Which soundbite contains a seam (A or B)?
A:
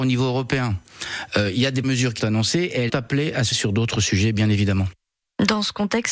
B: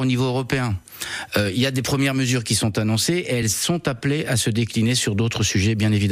A